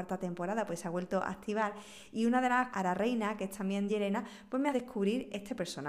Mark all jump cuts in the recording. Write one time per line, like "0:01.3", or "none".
0:02.7
0:03.9
0:04.7